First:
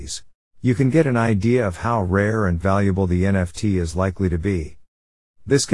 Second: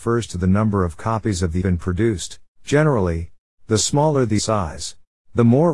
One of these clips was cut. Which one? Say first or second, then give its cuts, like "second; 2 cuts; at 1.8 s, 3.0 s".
second; 3 cuts; at 1.6 s, 2.5 s, 4.4 s